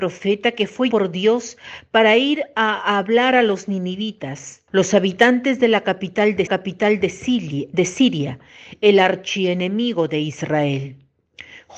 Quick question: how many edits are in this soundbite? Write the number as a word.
three